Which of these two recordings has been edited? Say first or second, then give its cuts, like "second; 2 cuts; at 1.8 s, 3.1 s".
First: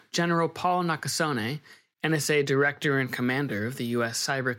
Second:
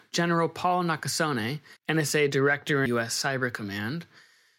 second; 2 cuts; at 1.8 s, 2.9 s